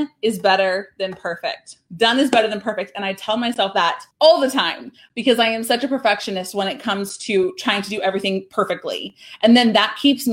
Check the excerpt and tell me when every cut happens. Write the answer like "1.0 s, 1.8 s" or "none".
4.1 s